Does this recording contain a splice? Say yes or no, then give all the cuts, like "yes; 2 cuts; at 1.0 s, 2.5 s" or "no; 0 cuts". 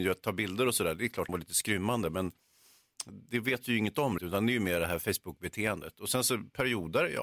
yes; 2 cuts; at 1.3 s, 4.2 s